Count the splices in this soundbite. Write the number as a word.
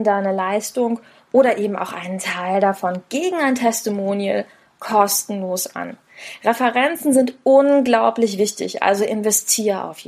zero